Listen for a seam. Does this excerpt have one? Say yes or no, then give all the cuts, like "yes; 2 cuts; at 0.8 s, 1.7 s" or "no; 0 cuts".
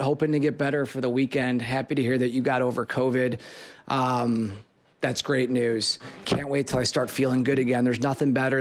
yes; 1 cut; at 6.2 s